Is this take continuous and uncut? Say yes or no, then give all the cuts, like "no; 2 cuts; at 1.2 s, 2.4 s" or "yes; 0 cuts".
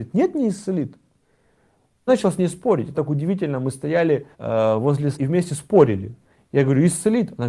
no; 4 cuts; at 2.1 s, 2.9 s, 4.3 s, 5.1 s